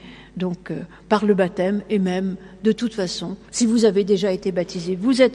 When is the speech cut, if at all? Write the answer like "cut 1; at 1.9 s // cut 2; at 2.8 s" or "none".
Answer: cut 1; at 3.4 s